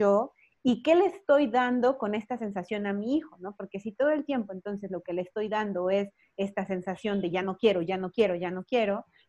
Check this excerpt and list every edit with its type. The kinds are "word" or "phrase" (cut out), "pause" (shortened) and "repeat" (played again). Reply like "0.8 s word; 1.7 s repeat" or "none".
none